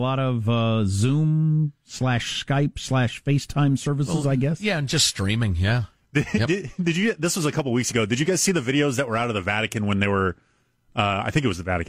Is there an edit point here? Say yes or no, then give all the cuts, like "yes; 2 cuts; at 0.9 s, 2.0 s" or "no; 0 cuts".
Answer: no; 0 cuts